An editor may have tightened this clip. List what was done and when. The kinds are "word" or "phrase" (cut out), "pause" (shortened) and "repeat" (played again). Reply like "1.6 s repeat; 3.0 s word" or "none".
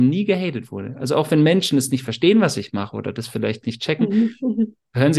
none